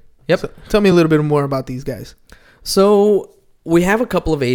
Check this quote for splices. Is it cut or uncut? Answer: uncut